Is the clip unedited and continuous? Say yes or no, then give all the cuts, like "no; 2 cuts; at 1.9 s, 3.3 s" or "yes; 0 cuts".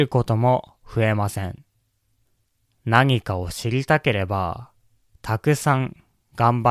no; 1 cut; at 2.2 s